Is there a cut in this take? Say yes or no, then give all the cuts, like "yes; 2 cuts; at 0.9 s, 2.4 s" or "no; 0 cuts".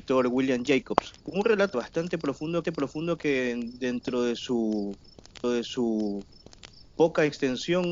yes; 4 cuts; at 1.2 s, 1.7 s, 2.6 s, 5.4 s